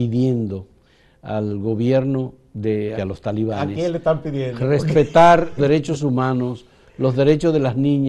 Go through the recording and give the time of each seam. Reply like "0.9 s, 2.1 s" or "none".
2.9 s, 5.6 s